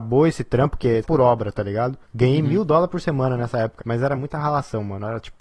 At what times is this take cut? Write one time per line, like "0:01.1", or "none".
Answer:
0:01.0
0:02.0
0:03.8